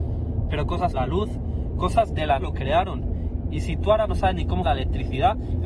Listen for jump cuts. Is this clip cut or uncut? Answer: cut